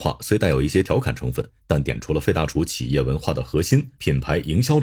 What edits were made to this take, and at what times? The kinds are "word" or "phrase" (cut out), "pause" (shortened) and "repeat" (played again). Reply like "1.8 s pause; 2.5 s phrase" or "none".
none